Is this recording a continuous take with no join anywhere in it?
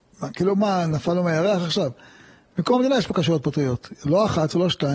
yes; 0 cuts

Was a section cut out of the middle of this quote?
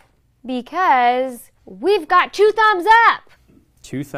yes; 1 cut; at 1.6 s

